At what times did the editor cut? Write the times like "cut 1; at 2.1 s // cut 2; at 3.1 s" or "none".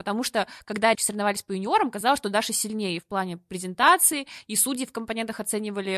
cut 1; at 0.9 s